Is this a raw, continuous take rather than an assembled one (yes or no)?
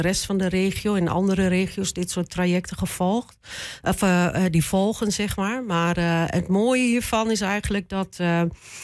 yes